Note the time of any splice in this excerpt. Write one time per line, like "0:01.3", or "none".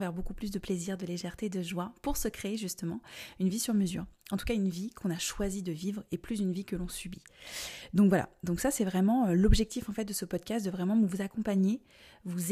none

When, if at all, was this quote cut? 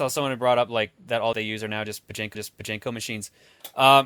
0:01.3
0:02.3

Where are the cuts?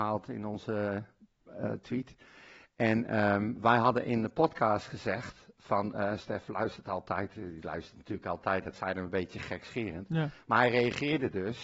none

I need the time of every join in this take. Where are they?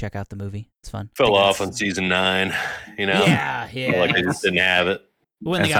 none

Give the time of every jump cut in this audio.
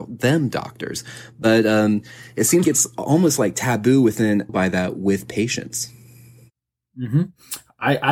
0:02.6
0:04.5

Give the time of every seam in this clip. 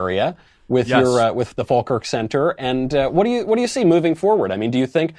none

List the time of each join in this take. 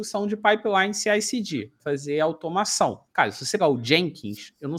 0:01.8
0:03.1
0:03.6

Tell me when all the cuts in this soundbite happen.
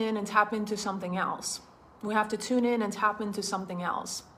none

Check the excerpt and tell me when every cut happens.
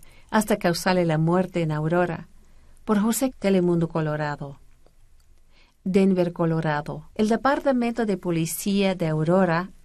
0:03.3
0:07.1

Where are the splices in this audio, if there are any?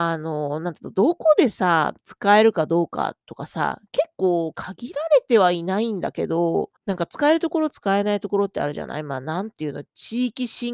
0:02.0
0:03.9
0:04.5
0:06.8

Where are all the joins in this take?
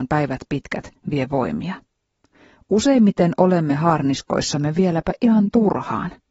none

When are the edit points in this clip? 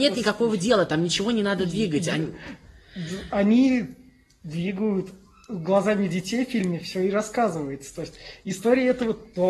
none

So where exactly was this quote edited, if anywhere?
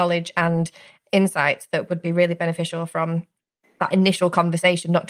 none

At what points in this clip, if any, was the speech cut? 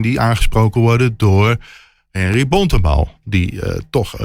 none

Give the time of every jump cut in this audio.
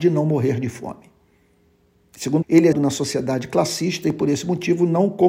0:02.4
0:02.7

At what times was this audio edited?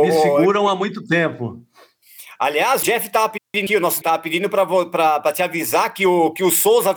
0:02.8
0:03.7
0:04.0

